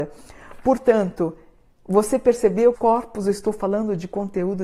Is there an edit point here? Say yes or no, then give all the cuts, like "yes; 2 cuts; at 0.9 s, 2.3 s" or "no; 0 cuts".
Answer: yes; 1 cut; at 2.7 s